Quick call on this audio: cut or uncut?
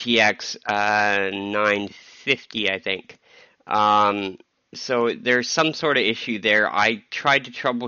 uncut